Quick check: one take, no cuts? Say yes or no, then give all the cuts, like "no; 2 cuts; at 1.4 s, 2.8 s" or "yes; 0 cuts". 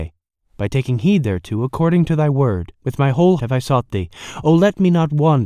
no; 2 cuts; at 2.7 s, 3.4 s